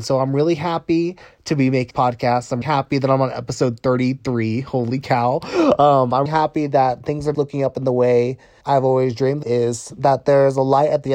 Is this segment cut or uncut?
cut